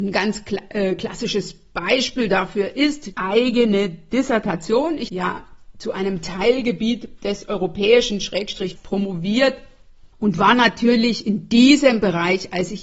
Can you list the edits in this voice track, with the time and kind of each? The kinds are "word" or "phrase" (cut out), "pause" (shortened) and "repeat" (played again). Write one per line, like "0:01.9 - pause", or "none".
0:03.1 - word
0:05.1 - word
0:08.8 - phrase
0:10.1 - pause